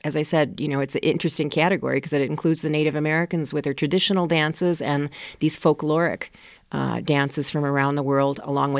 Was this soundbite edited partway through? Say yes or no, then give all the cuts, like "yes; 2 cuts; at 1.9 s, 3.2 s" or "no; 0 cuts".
no; 0 cuts